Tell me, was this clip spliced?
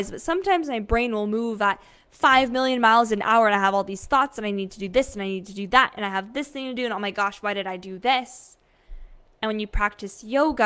no; 0 cuts

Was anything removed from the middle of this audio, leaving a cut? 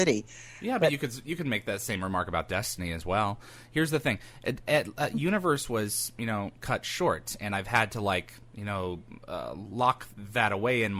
no; 0 cuts

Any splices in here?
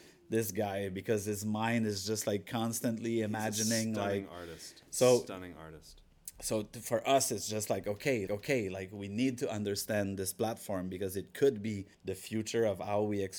yes; 2 cuts; at 8.3 s, 11.9 s

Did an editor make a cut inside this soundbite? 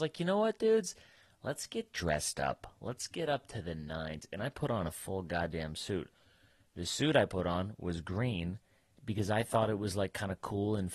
no; 0 cuts

